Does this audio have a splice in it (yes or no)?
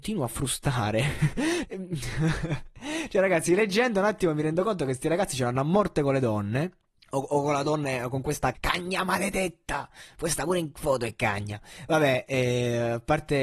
yes